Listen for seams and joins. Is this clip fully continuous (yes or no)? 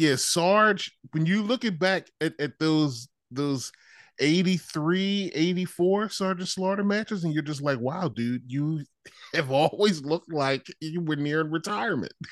yes